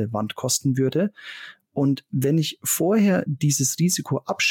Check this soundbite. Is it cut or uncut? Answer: uncut